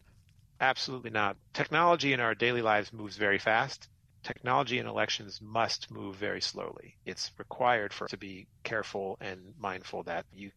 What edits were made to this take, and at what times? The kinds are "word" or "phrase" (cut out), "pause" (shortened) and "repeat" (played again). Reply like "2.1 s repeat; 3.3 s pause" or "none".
8.1 s word